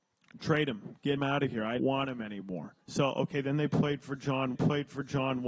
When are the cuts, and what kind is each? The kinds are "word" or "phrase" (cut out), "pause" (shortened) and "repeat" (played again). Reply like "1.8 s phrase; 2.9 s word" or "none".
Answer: 1.2 s word; 1.8 s word; 2.8 s pause; 4.5 s repeat